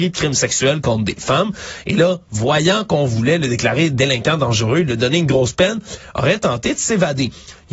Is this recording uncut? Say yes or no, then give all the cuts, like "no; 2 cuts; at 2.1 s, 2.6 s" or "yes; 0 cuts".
yes; 0 cuts